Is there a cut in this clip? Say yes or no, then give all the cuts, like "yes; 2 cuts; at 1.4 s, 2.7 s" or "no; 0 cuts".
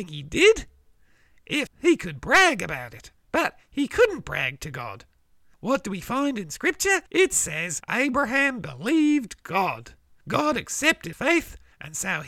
yes; 3 cuts; at 1.7 s, 3.2 s, 11.1 s